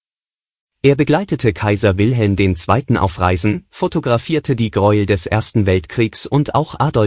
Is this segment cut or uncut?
uncut